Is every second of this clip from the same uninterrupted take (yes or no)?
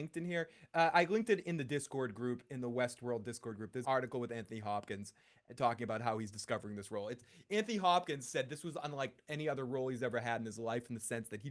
no